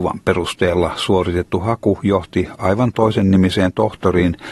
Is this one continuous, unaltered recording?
yes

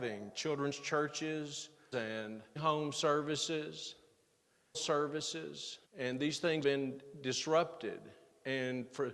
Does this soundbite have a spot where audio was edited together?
yes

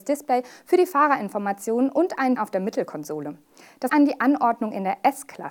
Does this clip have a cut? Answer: yes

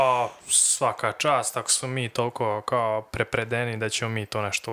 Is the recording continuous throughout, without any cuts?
yes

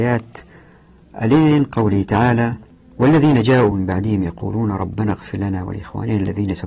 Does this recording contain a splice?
no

